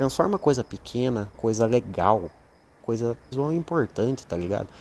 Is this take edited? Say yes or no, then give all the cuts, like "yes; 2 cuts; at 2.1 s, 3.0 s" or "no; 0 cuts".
yes; 3 cuts; at 1.3 s, 2.8 s, 3.3 s